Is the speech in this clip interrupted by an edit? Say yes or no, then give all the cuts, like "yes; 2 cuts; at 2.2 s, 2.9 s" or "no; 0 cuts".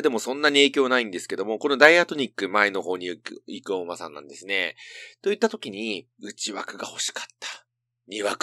yes; 1 cut; at 6.1 s